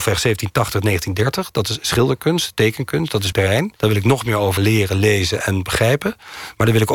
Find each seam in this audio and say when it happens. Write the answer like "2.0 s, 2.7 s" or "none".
3.3 s, 3.8 s, 4.6 s